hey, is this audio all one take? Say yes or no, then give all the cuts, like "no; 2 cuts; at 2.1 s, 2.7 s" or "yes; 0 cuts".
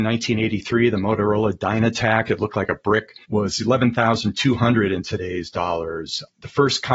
no; 1 cut; at 3.2 s